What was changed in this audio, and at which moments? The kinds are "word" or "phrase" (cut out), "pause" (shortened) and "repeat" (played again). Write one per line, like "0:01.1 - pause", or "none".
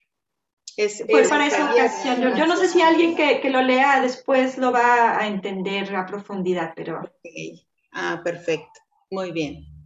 0:01.3 - word